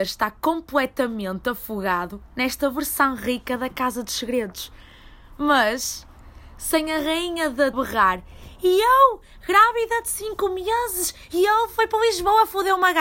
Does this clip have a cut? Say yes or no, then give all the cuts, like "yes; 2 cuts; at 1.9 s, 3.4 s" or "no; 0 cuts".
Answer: yes; 1 cut; at 7.7 s